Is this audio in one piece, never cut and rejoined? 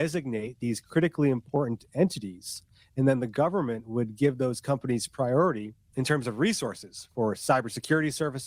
yes; 0 cuts

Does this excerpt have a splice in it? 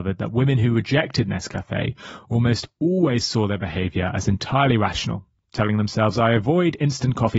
no; 0 cuts

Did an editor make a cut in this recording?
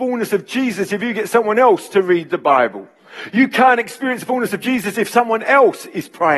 no; 0 cuts

